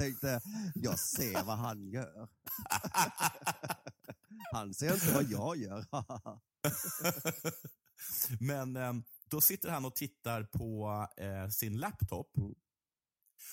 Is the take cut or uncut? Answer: cut